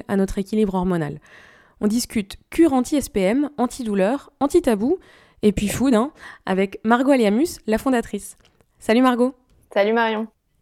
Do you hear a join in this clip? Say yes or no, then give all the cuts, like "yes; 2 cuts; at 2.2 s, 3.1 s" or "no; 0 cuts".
no; 0 cuts